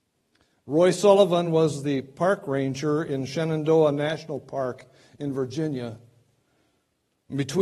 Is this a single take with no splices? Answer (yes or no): yes